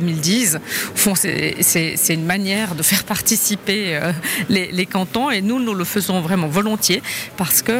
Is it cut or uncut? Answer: uncut